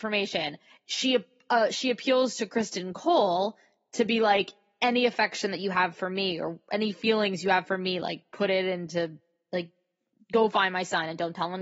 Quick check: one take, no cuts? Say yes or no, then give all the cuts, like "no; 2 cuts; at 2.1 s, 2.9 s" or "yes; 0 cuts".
yes; 0 cuts